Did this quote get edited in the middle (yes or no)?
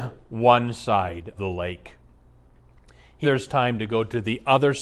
yes